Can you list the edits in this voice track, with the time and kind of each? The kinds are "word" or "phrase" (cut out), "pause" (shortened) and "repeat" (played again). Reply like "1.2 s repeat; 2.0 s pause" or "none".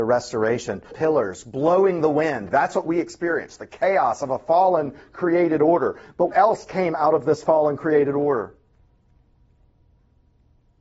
0.9 s phrase; 6.3 s word